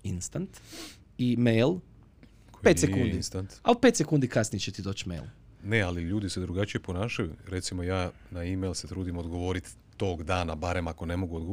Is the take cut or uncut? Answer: uncut